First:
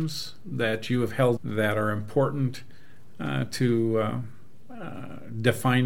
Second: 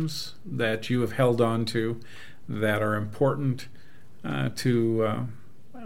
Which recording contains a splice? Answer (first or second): first